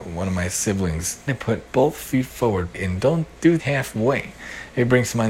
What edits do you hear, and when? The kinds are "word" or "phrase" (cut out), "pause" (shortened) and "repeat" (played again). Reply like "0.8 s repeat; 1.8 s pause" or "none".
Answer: 1.3 s word; 1.7 s word; 2.7 s phrase; 3.6 s word